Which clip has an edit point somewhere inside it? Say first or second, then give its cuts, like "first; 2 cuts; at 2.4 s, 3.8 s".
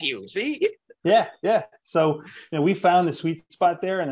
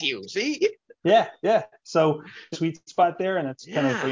second; 1 cut; at 2.5 s